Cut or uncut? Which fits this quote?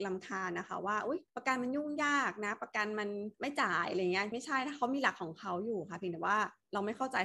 cut